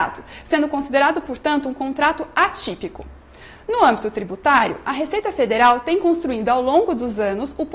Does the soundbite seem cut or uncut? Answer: uncut